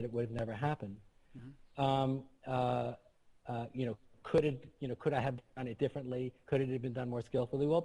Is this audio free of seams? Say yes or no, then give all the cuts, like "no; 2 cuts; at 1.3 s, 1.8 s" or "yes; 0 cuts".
yes; 0 cuts